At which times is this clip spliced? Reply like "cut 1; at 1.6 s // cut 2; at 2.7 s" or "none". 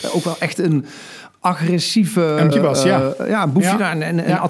cut 1; at 2.5 s